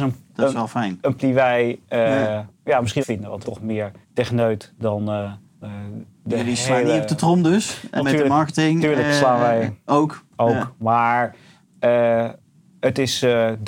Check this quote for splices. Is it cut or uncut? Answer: cut